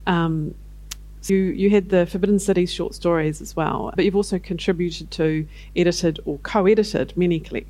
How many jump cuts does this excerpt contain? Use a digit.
2